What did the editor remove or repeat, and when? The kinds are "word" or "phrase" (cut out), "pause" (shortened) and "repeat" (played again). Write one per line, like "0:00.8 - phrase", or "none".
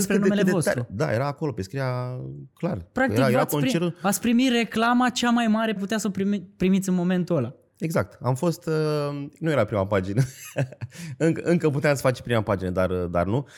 0:05.8 - word